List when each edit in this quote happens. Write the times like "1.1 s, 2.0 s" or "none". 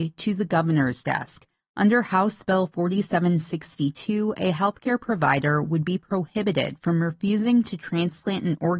none